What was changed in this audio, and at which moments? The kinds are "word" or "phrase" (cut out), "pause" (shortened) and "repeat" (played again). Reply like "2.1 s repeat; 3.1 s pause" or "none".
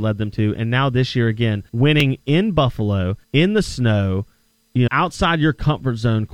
1.7 s pause; 3.2 s pause; 4.9 s word